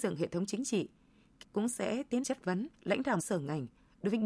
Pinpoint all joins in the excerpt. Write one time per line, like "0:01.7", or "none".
0:01.4
0:02.2
0:02.7
0:03.2